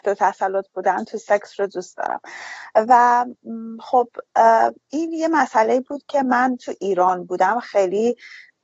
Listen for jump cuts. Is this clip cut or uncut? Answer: cut